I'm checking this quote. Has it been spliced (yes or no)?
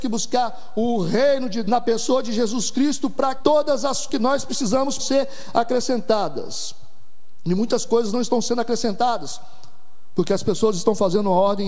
yes